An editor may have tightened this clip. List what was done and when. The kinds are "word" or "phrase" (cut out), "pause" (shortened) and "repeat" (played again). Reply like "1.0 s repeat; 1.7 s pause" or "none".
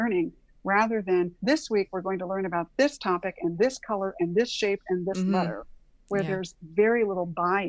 1.4 s pause